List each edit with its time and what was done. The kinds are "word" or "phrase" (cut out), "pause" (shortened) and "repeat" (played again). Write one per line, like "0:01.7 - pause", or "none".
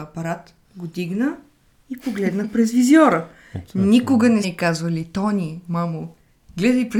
0:04.4 - word